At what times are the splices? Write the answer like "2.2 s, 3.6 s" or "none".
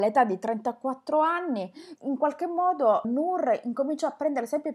2.0 s, 3.0 s